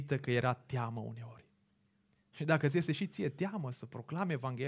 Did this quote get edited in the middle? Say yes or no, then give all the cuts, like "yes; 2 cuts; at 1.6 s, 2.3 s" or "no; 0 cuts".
no; 0 cuts